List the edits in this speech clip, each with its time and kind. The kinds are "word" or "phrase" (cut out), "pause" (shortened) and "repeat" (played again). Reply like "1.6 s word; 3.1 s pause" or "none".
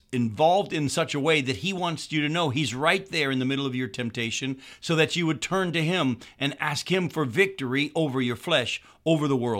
none